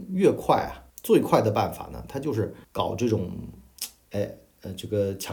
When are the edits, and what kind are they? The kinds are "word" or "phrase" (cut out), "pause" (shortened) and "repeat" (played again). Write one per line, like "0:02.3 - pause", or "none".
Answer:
0:00.9 - pause
0:02.6 - pause